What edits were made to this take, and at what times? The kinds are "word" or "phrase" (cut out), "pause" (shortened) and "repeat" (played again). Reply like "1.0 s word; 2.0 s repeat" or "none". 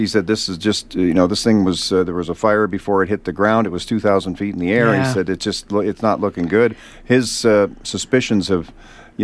none